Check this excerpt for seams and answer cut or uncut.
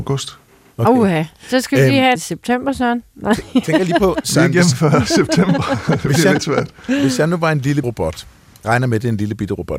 cut